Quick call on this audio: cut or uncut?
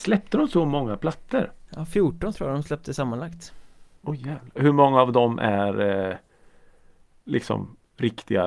cut